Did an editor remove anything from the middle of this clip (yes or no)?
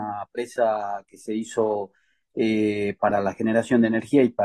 no